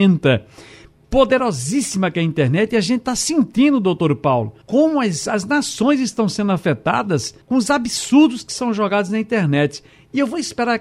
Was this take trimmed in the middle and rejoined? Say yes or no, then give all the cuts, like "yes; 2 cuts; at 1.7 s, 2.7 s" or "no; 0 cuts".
yes; 2 cuts; at 4.6 s, 7.4 s